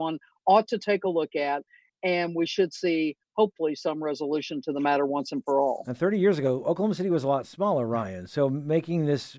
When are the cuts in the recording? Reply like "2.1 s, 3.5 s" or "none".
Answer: none